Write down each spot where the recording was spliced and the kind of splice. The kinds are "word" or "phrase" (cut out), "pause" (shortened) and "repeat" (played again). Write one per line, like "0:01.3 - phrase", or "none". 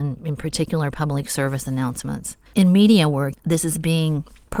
0:02.5 - pause
0:03.3 - phrase